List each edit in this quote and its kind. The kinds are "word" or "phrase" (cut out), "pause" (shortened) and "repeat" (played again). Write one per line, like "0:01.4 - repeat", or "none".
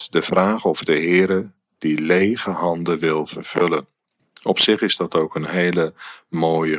0:04.2 - pause